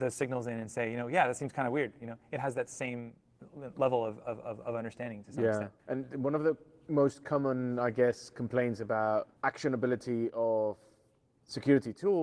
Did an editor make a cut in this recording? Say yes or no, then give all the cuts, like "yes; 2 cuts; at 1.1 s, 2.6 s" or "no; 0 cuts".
yes; 2 cuts; at 5.8 s, 9.4 s